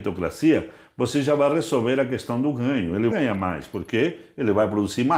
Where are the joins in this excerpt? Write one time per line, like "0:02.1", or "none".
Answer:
0:03.1